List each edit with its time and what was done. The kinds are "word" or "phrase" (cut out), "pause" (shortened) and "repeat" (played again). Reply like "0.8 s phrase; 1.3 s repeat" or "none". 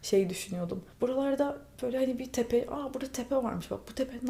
0.9 s pause